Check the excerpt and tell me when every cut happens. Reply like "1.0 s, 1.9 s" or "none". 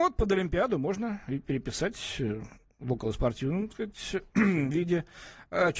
3.7 s